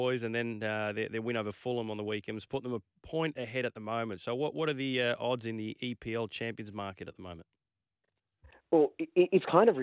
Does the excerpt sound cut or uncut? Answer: uncut